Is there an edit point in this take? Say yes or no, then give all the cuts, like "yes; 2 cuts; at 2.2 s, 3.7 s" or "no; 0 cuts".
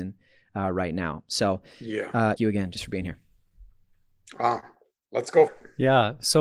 yes; 2 cuts; at 2.4 s, 5.5 s